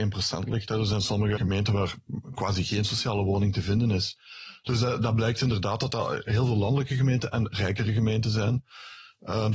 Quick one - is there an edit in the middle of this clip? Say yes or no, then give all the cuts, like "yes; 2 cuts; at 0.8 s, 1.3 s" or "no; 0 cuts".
yes; 1 cut; at 1.4 s